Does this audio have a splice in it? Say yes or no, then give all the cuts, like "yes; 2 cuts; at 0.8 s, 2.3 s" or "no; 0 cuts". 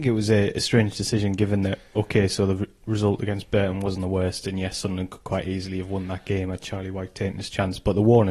no; 0 cuts